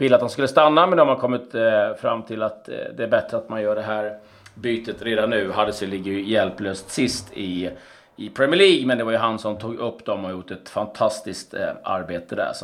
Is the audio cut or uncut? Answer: uncut